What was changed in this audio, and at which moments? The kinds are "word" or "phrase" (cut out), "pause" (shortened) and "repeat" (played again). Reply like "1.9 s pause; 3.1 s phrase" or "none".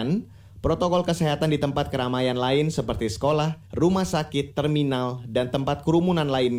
3.7 s pause